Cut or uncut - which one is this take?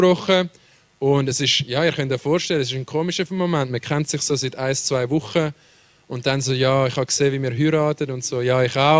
uncut